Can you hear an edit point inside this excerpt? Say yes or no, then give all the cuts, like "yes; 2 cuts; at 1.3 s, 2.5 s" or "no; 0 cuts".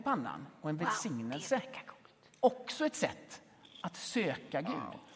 no; 0 cuts